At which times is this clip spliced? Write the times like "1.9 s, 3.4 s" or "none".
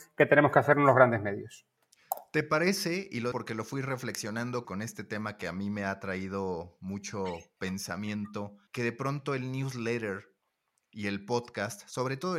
3.3 s, 4.6 s, 8.7 s